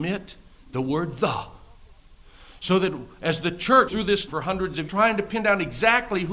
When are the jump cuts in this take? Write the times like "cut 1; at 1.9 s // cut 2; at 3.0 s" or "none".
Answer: cut 1; at 3.9 s // cut 2; at 4.3 s // cut 3; at 4.9 s